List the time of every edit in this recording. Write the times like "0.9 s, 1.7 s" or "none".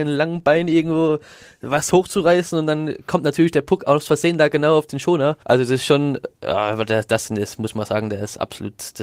5.4 s